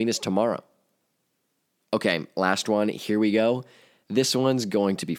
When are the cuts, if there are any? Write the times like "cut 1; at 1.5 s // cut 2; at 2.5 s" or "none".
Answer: none

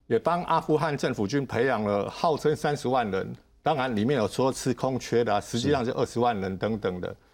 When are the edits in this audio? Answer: none

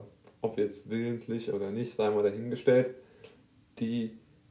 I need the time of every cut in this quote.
none

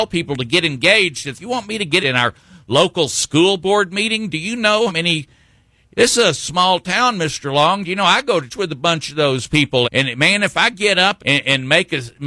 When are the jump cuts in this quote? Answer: cut 1; at 1.3 s // cut 2; at 2.0 s // cut 3; at 4.9 s // cut 4; at 8.5 s // cut 5; at 9.8 s // cut 6; at 11.2 s

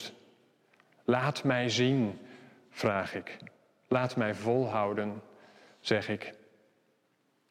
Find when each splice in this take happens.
none

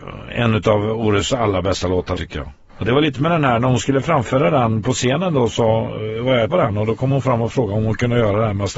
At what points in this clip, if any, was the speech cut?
cut 1; at 2.2 s // cut 2; at 2.7 s // cut 3; at 3.1 s // cut 4; at 6.5 s

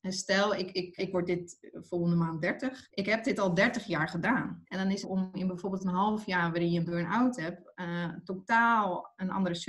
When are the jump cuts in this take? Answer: cut 1; at 1.0 s // cut 2; at 5.0 s

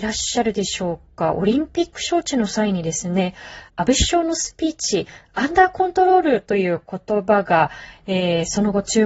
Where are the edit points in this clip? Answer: cut 1; at 3.7 s

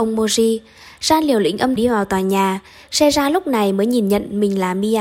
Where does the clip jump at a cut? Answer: cut 1; at 1.8 s

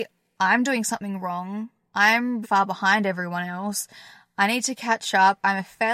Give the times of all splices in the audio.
cut 1; at 2.4 s

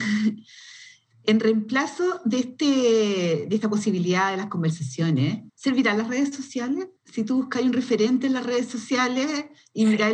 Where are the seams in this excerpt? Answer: cut 1; at 5.5 s // cut 2; at 7.0 s

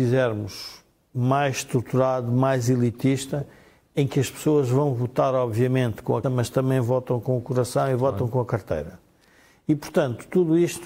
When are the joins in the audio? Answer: cut 1; at 6.2 s

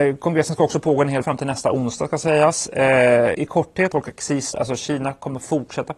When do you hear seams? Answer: cut 1; at 1.2 s // cut 2; at 3.3 s // cut 3; at 3.9 s // cut 4; at 4.5 s

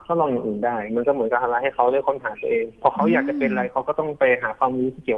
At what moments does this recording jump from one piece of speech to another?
none

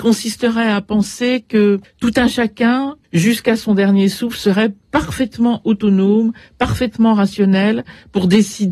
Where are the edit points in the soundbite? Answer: cut 1; at 1.8 s // cut 2; at 3.0 s

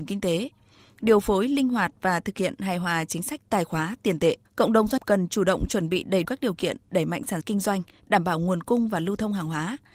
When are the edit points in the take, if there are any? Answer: cut 1; at 4.5 s // cut 2; at 5.0 s // cut 3; at 6.2 s // cut 4; at 7.4 s

